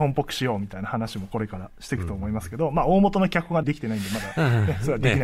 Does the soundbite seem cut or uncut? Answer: uncut